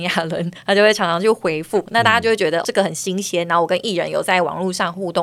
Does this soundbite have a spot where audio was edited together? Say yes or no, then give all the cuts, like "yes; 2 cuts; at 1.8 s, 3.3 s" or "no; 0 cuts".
yes; 1 cut; at 2.6 s